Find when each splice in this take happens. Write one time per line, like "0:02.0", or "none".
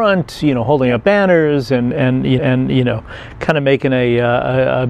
0:02.4